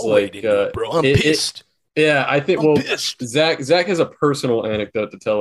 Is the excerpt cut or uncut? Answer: uncut